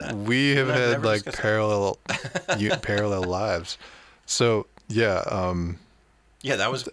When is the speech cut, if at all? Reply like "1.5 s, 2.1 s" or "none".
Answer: none